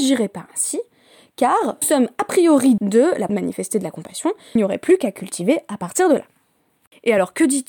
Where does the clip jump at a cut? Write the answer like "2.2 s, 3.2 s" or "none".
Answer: 1.8 s, 2.8 s, 3.3 s, 4.6 s